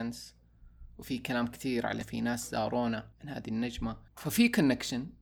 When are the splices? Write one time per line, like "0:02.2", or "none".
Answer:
0:02.0
0:03.1
0:04.1